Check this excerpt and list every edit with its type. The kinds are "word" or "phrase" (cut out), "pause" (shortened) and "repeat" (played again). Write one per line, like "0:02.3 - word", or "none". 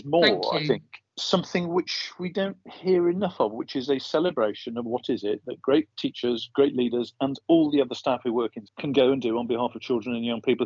0:01.1 - pause
0:08.6 - word